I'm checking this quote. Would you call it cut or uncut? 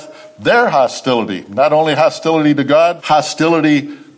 cut